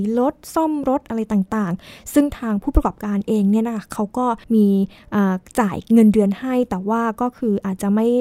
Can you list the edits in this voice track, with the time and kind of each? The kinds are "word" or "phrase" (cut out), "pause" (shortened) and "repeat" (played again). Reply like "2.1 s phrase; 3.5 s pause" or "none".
4.4 s pause